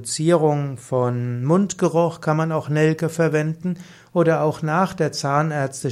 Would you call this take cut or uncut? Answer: uncut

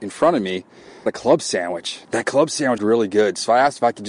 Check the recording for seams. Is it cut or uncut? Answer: cut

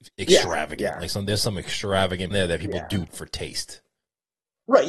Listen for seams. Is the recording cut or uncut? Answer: cut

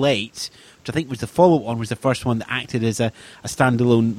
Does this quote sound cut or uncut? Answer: uncut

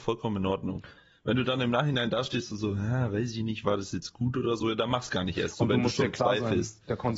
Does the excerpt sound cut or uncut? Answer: uncut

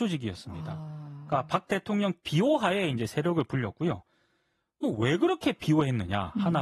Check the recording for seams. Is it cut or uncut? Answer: uncut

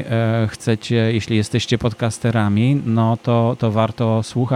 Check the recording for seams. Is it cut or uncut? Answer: uncut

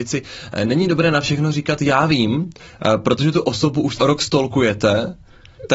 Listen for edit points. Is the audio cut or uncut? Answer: cut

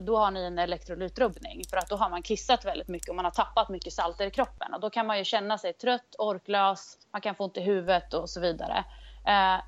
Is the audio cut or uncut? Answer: cut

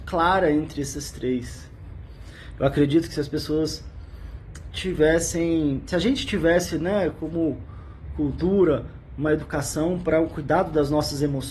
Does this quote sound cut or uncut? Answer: uncut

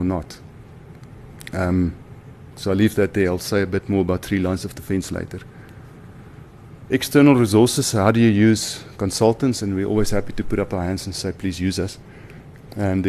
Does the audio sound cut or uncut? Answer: uncut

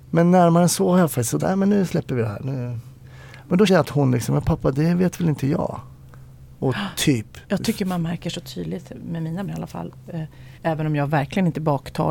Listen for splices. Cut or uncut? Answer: cut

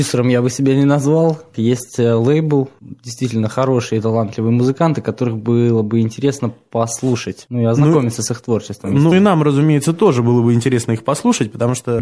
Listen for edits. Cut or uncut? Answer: cut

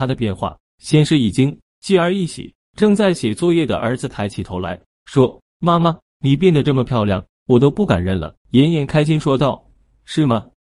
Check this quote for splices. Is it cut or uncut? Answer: cut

